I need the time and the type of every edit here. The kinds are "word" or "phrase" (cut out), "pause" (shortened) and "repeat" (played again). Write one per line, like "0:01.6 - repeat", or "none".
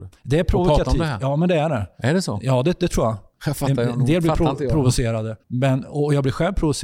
0:05.4 - pause